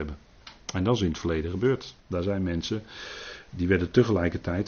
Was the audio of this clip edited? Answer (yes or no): yes